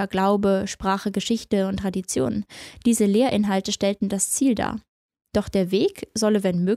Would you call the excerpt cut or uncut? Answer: uncut